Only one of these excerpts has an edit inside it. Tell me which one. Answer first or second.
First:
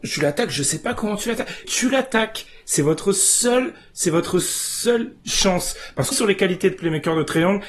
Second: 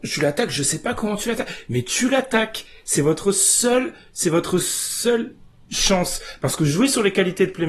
first